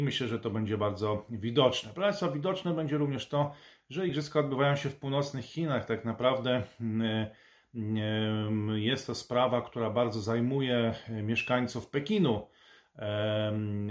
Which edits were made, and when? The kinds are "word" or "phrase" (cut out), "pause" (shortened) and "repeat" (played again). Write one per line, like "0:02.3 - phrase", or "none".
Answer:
none